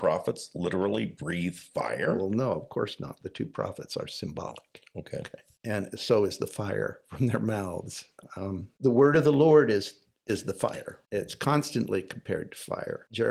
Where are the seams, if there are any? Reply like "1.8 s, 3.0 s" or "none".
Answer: none